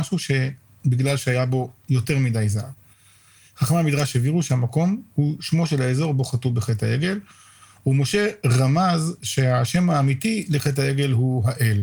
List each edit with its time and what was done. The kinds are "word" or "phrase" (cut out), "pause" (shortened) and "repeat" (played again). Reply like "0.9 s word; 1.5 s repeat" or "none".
none